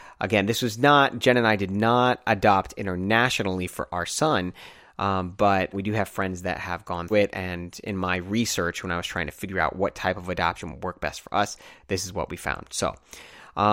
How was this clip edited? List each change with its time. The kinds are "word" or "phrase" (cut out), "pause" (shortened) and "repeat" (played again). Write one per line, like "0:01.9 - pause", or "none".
0:05.7 - word
0:07.1 - word